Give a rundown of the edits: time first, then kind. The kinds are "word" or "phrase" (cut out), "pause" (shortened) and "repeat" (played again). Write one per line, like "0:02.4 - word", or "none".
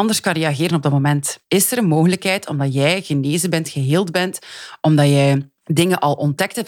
0:01.4 - pause
0:05.6 - pause